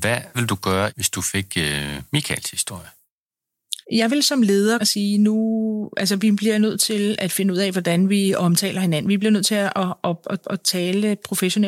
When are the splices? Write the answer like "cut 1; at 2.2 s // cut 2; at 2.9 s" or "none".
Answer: cut 1; at 3.8 s // cut 2; at 4.8 s // cut 3; at 10.4 s